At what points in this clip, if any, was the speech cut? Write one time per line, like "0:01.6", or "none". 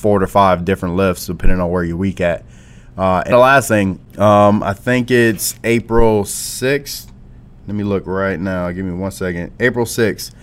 0:03.3
0:04.1

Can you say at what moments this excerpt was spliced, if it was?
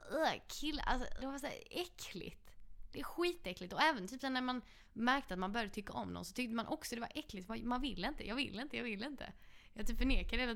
0:01.2
0:07.5

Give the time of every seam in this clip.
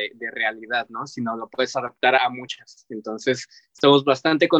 none

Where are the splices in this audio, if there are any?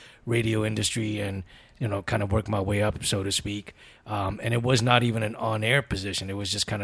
none

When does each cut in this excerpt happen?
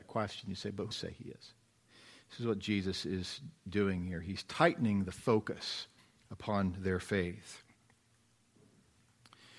0:00.9
0:06.0

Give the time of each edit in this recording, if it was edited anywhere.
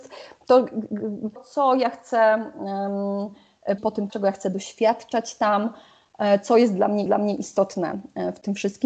0:01.4
0:03.8
0:04.1
0:07.1

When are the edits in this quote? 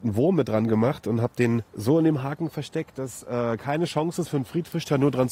0:01.7

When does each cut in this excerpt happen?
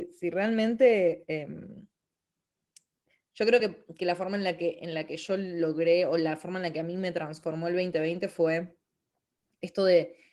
none

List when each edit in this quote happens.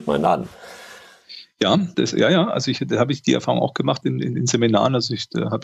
0:01.9

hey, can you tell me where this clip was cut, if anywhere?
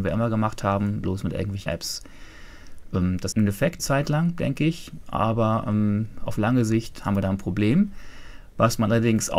0:01.0
0:01.7
0:03.3
0:03.8

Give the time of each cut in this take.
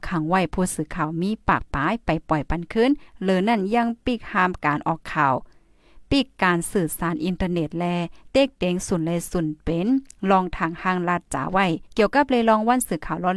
0:11.9

